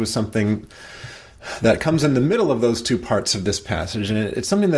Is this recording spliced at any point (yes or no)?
no